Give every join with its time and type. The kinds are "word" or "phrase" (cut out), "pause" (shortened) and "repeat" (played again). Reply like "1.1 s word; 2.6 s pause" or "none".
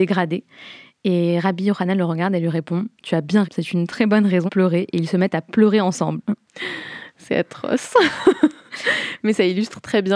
2.9 s pause; 3.4 s word; 4.5 s word